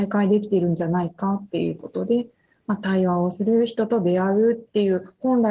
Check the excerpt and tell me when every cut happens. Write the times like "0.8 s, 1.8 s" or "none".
none